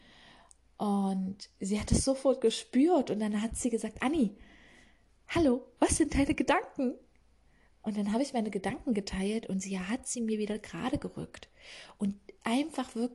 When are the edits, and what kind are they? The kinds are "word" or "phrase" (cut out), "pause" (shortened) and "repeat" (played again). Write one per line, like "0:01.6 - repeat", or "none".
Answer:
none